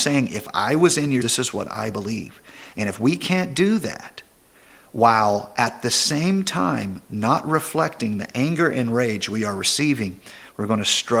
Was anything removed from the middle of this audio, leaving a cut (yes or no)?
yes